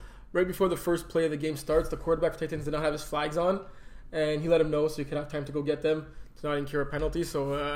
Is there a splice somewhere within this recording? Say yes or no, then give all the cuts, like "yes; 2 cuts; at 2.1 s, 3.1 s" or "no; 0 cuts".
no; 0 cuts